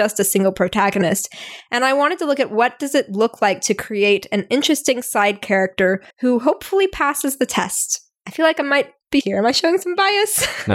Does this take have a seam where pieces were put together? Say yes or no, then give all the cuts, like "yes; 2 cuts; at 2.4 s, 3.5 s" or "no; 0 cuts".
yes; 2 cuts; at 6.1 s, 9.2 s